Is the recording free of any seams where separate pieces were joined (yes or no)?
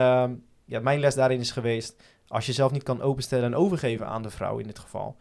yes